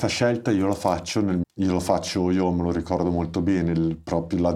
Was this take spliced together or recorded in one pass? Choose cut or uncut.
cut